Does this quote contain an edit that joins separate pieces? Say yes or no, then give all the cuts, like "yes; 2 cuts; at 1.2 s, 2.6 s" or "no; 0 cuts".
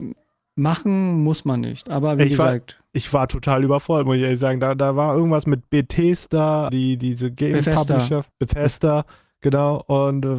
yes; 2 cuts; at 6.7 s, 8.3 s